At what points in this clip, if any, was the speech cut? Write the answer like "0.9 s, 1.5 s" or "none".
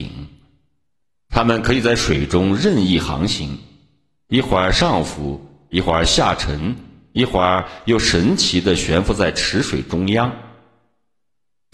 none